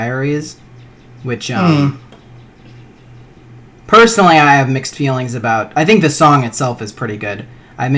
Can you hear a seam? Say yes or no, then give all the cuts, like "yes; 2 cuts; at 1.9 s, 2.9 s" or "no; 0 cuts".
no; 0 cuts